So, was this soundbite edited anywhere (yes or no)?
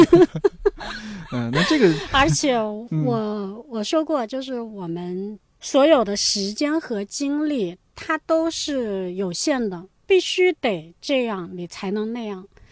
no